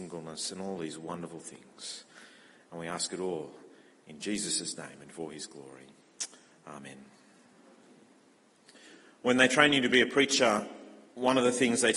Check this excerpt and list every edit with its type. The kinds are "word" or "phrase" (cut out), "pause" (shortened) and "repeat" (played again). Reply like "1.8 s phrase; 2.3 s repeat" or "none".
none